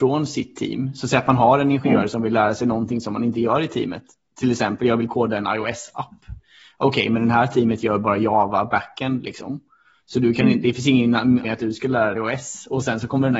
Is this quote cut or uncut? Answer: cut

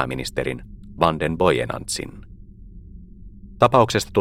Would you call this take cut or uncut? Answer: cut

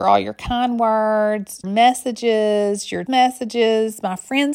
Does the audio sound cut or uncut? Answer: cut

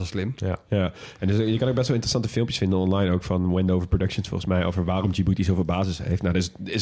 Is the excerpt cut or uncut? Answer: uncut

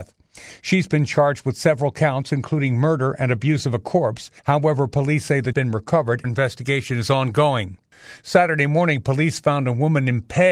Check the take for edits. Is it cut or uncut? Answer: cut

